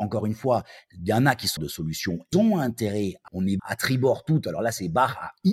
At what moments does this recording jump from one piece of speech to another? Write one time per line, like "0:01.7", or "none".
0:01.6
0:02.3
0:03.3
0:03.6